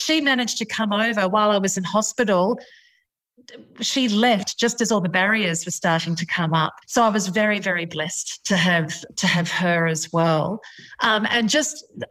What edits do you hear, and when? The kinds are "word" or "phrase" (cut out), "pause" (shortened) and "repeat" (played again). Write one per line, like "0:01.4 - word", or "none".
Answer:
0:06.8 - pause